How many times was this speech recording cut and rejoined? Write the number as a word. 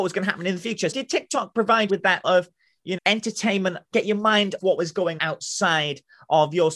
seven